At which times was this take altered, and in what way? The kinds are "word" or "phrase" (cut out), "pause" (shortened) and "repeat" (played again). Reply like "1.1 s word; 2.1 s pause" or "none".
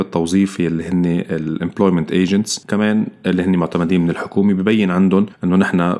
none